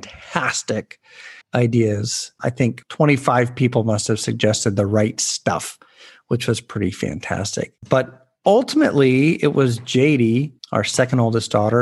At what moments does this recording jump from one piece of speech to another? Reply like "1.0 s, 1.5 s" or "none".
1.4 s, 10.6 s